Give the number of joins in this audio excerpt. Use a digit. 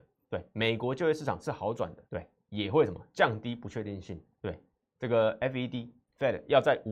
2